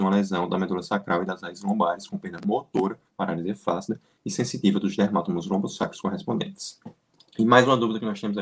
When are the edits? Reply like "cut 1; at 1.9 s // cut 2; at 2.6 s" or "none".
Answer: none